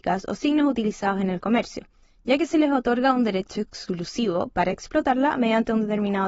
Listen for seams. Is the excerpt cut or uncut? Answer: uncut